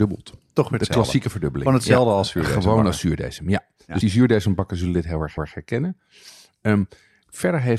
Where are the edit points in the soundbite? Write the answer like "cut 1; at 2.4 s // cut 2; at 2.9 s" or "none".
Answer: cut 1; at 4.0 s // cut 2; at 5.4 s